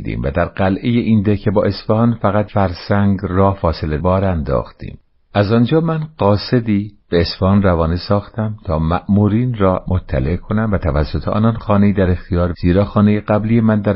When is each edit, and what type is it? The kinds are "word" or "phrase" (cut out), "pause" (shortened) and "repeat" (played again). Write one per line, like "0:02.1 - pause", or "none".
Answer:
0:02.5 - word
0:04.0 - word
0:05.1 - pause
0:09.9 - phrase
0:12.5 - word